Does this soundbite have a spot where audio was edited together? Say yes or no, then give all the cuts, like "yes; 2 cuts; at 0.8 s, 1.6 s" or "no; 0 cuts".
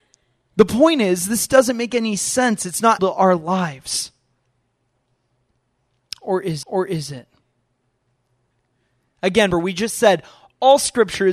yes; 3 cuts; at 3.0 s, 6.6 s, 9.5 s